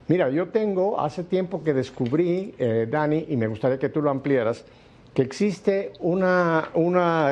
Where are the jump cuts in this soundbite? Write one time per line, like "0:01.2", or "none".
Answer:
none